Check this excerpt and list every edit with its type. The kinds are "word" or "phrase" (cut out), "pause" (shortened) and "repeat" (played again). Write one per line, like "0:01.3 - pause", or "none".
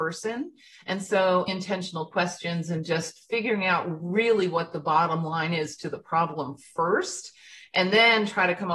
0:01.5 - word